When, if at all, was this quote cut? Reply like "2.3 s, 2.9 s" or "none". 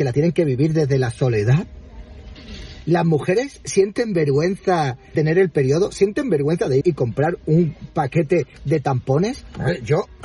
5.1 s, 6.8 s, 8.5 s